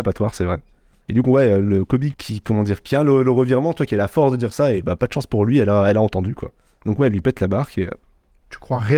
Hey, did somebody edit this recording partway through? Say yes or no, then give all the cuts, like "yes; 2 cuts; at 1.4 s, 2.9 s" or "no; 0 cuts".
no; 0 cuts